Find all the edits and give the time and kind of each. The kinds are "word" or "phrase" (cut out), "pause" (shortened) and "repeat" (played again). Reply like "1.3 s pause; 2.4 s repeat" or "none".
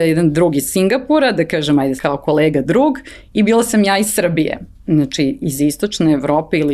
2.0 s word